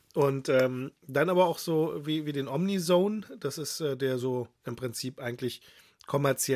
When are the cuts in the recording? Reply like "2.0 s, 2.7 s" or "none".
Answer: none